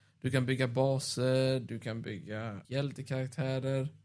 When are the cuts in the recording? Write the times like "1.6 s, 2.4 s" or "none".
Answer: 2.6 s